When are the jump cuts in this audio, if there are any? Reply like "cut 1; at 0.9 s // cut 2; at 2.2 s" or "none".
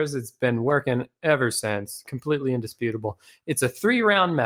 none